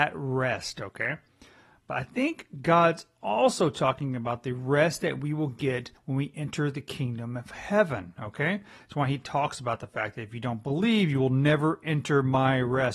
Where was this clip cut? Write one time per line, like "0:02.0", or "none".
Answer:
0:06.0